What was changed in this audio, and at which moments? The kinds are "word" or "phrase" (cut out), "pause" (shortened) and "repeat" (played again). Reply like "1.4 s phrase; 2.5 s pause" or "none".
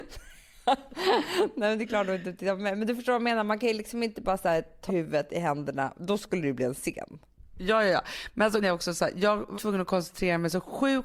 4.9 s word; 8.6 s word; 9.5 s word

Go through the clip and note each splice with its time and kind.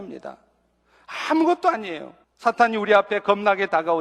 2.2 s pause

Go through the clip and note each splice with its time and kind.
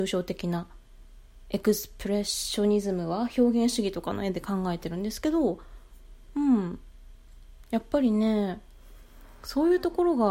6.2 s pause

